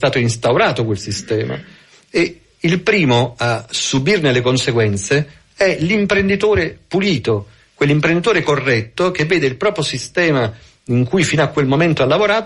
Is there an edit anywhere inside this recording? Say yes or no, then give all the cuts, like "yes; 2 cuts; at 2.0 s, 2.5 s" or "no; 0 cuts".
no; 0 cuts